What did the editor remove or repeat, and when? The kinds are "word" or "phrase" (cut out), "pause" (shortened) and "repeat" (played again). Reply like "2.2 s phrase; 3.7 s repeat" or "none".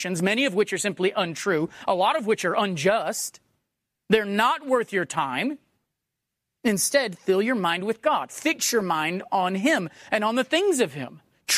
none